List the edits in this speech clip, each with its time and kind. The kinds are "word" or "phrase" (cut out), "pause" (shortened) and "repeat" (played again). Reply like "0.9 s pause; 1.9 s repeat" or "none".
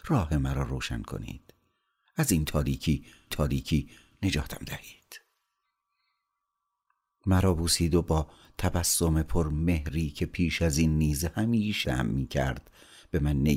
3.3 s repeat; 11.8 s word